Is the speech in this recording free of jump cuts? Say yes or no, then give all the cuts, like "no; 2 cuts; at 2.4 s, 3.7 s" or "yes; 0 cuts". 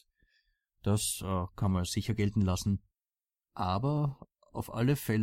yes; 0 cuts